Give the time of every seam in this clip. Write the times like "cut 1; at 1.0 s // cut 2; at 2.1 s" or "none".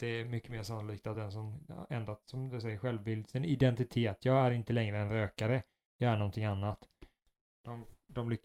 none